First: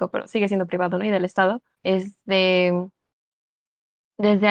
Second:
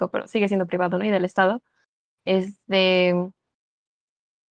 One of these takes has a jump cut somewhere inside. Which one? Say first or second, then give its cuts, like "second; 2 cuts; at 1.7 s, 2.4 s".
first; 1 cut; at 1.7 s